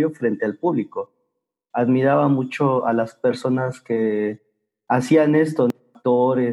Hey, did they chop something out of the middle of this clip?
no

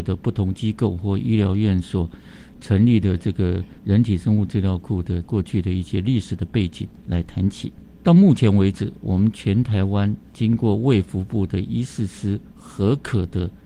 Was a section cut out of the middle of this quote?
yes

